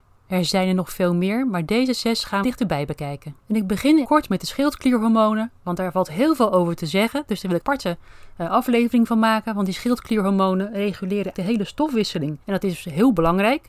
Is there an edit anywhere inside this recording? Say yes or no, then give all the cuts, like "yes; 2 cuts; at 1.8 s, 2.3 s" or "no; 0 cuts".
yes; 6 cuts; at 2.4 s, 3.4 s, 4.0 s, 7.6 s, 11.3 s, 12.4 s